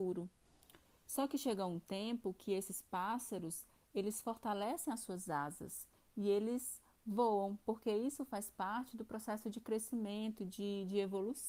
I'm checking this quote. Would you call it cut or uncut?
uncut